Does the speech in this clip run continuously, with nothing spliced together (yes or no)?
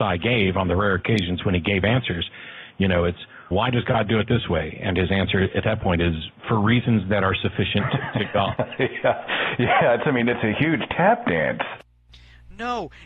no